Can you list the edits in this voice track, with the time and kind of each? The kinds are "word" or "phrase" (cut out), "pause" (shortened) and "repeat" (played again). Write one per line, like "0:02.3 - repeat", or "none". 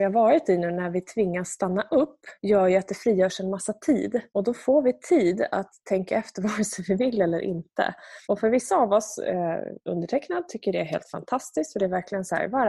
0:02.4 - pause
0:04.3 - pause
0:08.2 - pause
0:09.8 - pause